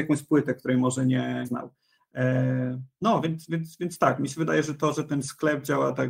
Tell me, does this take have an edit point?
yes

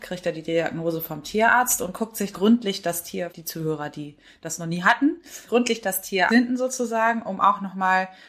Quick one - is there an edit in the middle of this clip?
yes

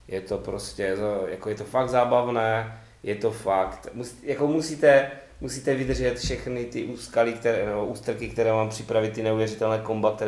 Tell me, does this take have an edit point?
no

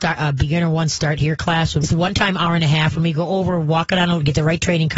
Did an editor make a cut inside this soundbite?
yes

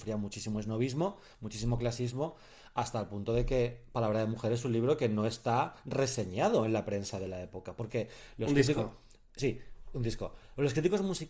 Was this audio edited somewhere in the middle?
no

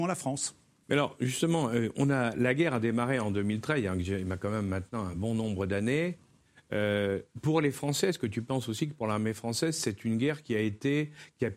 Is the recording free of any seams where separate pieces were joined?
yes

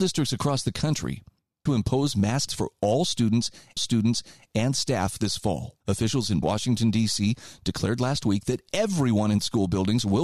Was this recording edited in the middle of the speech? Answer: yes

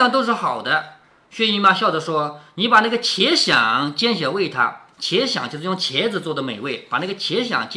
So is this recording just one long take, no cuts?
yes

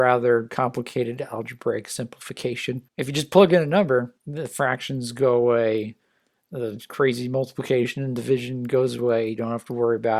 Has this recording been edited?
yes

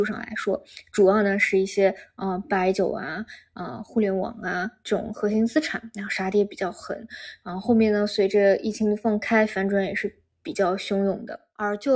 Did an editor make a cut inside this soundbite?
no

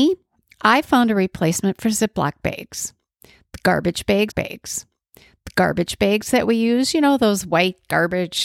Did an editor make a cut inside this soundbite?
yes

